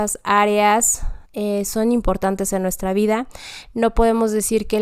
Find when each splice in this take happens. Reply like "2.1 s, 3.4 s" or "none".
1.2 s